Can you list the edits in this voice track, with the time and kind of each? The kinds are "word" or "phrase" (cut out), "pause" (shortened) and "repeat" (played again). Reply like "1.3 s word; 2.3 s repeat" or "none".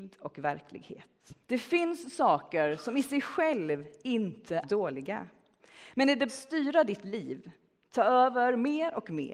1.4 s pause; 4.6 s word; 6.3 s word